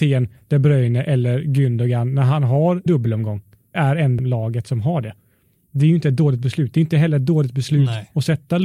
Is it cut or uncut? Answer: cut